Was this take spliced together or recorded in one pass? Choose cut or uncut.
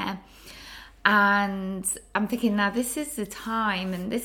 uncut